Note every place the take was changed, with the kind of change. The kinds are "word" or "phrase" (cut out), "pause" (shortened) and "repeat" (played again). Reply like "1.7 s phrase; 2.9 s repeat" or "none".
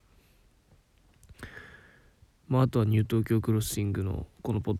none